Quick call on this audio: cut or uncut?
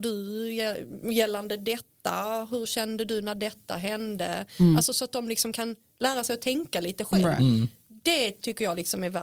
uncut